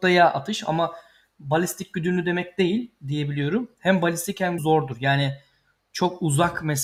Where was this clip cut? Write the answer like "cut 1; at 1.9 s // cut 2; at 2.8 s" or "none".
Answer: cut 1; at 4.6 s